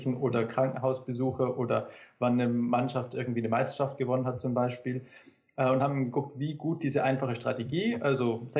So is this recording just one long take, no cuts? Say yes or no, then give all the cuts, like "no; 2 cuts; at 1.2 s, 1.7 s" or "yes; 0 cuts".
yes; 0 cuts